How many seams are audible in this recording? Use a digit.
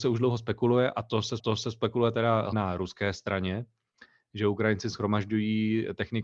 2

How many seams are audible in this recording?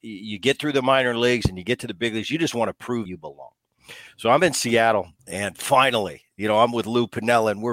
2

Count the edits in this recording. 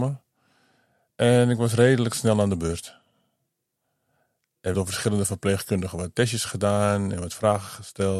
1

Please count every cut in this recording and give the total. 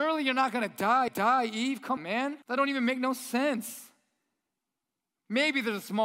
3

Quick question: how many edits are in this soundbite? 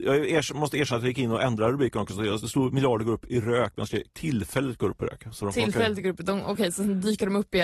0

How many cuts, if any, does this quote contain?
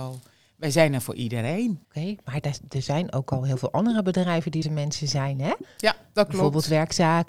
2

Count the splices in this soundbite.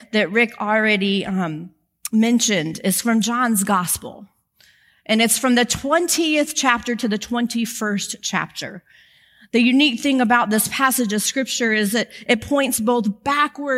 0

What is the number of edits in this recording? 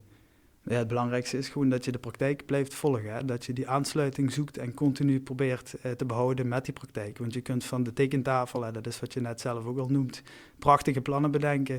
0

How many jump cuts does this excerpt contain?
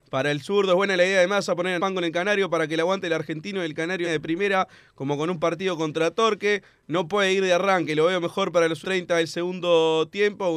3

